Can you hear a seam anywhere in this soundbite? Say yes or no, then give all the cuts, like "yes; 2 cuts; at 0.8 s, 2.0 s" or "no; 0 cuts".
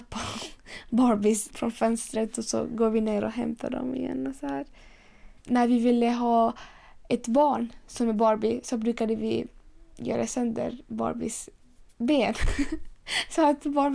yes; 2 cuts; at 1.5 s, 5.4 s